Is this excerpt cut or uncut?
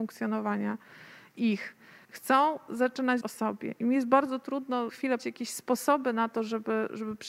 cut